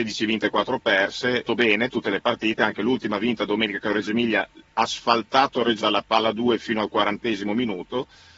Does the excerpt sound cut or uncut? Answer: cut